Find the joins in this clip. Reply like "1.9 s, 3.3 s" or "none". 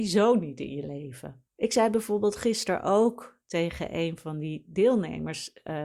1.5 s